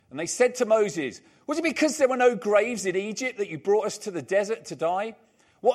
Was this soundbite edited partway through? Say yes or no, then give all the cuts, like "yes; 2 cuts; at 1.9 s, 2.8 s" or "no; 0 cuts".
no; 0 cuts